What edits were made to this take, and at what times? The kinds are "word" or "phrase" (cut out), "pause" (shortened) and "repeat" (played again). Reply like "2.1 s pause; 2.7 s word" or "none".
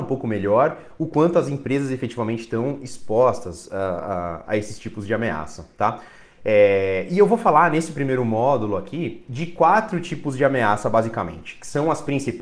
none